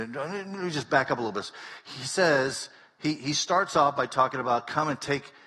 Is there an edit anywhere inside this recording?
no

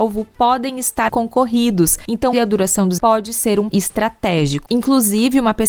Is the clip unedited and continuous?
no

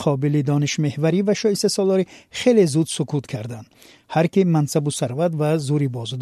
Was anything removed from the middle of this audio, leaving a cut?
no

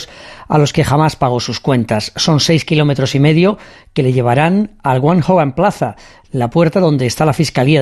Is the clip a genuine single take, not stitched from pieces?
yes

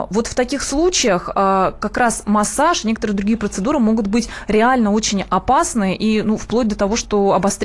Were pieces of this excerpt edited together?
no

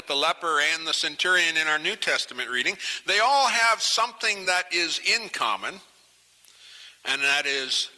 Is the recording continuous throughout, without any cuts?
yes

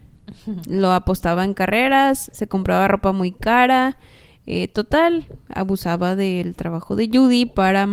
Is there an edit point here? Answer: no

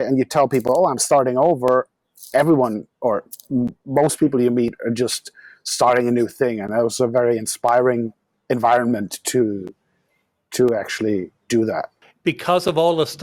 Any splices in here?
no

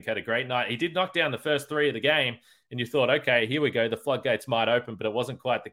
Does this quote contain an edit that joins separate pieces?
no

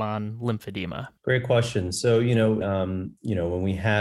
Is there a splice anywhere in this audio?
yes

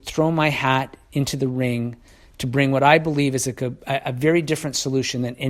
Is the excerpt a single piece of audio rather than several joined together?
yes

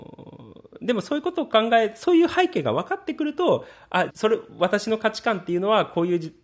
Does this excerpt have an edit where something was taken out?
yes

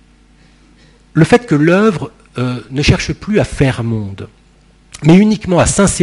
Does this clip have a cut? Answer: no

